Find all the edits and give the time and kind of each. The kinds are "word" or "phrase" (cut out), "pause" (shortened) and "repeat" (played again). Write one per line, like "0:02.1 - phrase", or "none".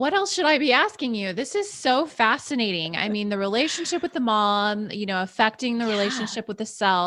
none